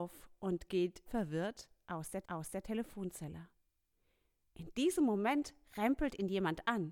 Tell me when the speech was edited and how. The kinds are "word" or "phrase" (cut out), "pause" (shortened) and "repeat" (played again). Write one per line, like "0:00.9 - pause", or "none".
0:01.1 - word
0:02.2 - repeat